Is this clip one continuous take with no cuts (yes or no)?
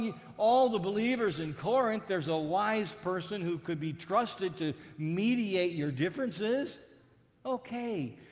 yes